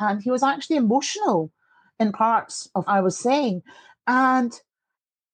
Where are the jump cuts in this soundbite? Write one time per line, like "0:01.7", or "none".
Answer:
0:02.9